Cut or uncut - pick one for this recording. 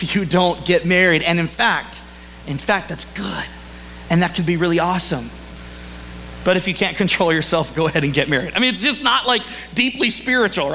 uncut